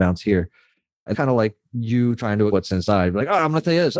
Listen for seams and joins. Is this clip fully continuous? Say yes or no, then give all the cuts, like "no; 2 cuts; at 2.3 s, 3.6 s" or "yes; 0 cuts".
no; 2 cuts; at 1.1 s, 2.5 s